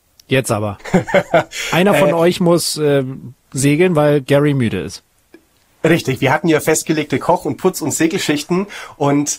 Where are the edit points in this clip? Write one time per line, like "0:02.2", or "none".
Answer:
none